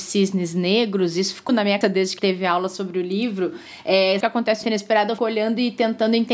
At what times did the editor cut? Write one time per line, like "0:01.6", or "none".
0:01.5
0:01.8
0:02.2
0:04.2
0:04.6
0:05.2